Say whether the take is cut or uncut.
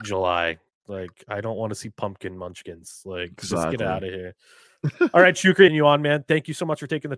cut